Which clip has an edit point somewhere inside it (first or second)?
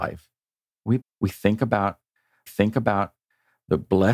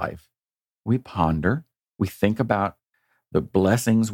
first